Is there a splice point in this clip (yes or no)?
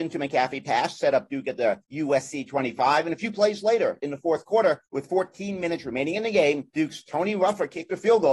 yes